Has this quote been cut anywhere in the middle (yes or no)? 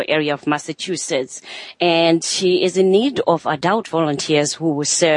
no